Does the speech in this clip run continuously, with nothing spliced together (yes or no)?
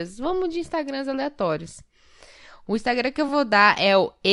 yes